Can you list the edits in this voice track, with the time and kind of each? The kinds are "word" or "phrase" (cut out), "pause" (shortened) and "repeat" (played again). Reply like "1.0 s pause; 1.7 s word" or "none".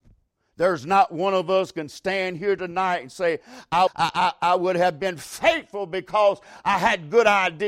3.9 s word